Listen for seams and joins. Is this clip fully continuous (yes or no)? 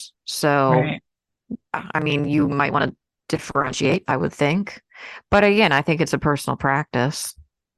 yes